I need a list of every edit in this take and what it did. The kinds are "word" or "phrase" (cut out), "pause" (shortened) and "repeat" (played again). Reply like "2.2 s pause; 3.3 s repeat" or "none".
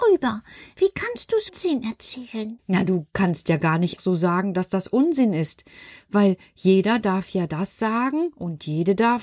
1.5 s word; 4.0 s word